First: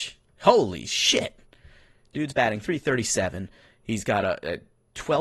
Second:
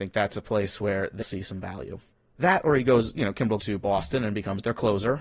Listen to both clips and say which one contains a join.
second; 3 cuts; at 1.2 s, 2.1 s, 3.6 s

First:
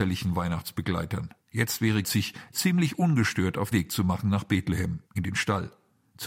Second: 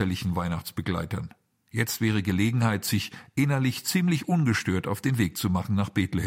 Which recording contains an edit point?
first; 5 cuts; at 1.4 s, 2.0 s, 2.5 s, 3.7 s, 5.1 s

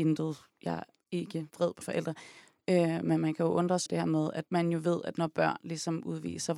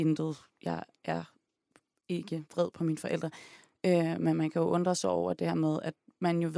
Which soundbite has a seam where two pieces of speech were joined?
first; 4 cuts; at 1.0 s, 1.8 s, 3.9 s, 4.5 s

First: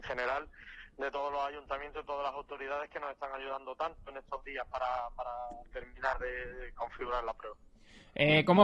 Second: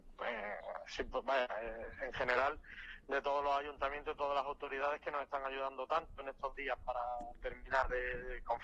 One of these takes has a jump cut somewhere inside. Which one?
second; 1 cut; at 6.8 s

